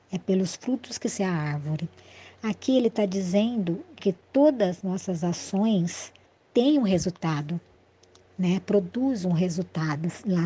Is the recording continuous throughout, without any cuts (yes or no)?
no